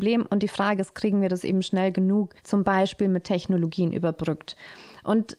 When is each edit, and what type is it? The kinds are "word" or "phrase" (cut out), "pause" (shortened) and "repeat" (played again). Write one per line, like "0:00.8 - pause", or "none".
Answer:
0:02.4 - pause